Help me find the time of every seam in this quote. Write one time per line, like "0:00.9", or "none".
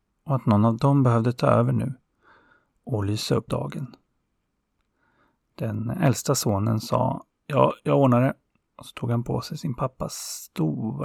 0:03.5